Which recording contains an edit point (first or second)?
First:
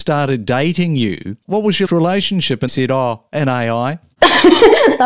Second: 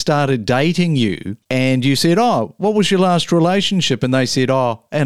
first